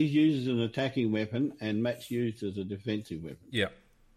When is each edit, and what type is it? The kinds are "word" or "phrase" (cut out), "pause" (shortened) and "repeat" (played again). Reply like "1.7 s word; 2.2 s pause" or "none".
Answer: none